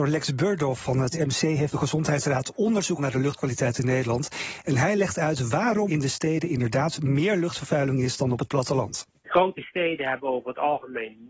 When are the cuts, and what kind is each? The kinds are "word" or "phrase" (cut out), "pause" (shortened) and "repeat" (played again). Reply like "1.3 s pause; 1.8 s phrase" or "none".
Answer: 1.1 s word; 1.7 s word; 3.0 s word; 5.9 s word